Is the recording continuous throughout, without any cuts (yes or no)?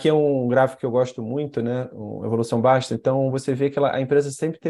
yes